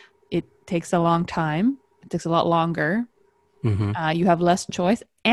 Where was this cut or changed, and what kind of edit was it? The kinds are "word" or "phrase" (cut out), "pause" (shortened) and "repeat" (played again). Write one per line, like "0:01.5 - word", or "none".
none